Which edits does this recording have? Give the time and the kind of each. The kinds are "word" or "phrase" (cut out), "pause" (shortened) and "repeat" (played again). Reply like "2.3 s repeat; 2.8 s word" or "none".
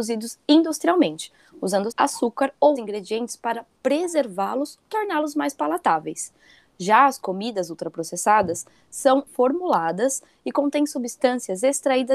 1.9 s word; 2.8 s word; 4.8 s word; 9.3 s word